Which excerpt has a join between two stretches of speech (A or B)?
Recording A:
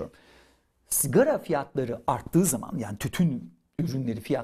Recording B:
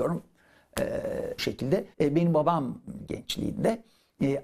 B